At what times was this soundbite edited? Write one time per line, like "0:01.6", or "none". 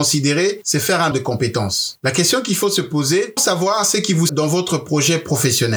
0:01.1
0:03.4
0:04.3